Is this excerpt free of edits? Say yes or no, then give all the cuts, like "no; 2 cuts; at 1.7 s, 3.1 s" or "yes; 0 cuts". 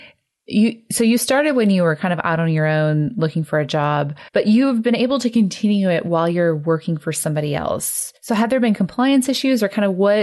no; 2 cuts; at 4.3 s, 8.2 s